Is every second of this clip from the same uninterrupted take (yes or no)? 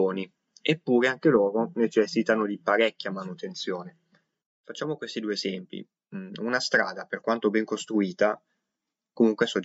yes